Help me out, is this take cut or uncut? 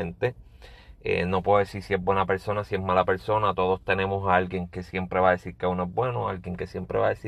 uncut